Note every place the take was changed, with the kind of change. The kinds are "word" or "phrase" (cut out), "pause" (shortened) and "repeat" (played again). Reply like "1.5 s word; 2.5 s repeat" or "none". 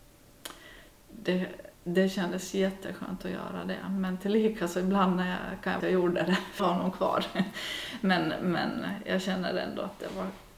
1.7 s pause; 5.8 s phrase; 6.6 s phrase